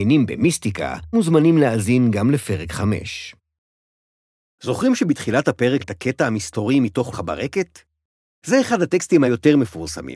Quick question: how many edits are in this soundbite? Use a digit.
4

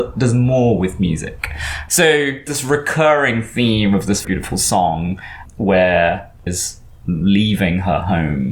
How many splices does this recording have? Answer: 3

